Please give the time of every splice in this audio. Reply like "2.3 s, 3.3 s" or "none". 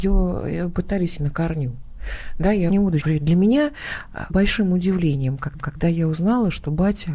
1.2 s, 2.7 s, 3.0 s, 4.3 s, 5.6 s